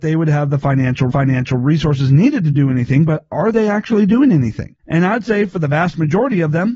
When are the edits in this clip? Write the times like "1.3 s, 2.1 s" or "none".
1.1 s, 4.8 s